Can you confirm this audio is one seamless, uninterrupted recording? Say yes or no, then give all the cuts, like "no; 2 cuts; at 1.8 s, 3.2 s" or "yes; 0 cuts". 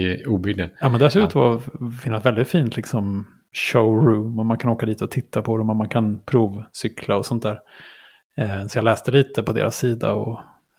yes; 0 cuts